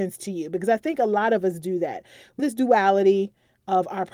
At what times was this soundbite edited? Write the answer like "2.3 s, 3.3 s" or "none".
2.4 s